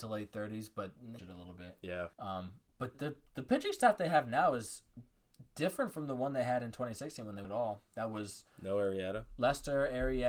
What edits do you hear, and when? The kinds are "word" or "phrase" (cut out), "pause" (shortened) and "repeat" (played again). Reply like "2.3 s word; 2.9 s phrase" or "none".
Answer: 1.2 s phrase; 2.1 s pause; 2.9 s word; 7.4 s word